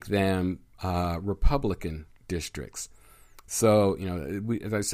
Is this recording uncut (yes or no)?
yes